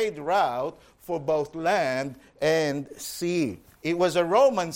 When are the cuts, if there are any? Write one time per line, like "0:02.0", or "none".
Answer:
0:03.7